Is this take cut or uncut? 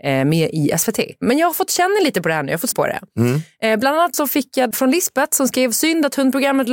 cut